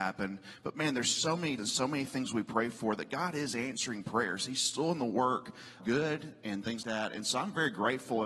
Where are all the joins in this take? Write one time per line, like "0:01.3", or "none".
0:01.6
0:05.8
0:06.8